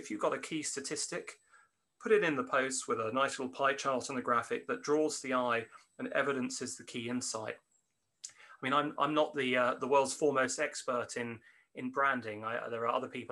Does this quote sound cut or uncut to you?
uncut